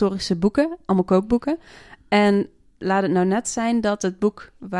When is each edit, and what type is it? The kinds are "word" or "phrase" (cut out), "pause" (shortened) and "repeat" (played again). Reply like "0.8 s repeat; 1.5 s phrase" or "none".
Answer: none